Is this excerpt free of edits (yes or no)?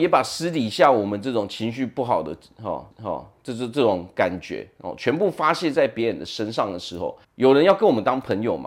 no